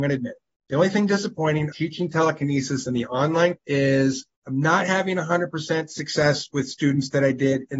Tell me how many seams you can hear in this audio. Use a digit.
3